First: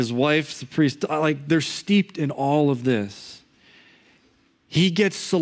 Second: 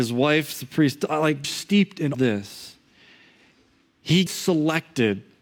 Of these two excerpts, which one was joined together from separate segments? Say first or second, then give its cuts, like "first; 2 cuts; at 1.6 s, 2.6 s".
second; 3 cuts; at 1.4 s, 2.1 s, 4.3 s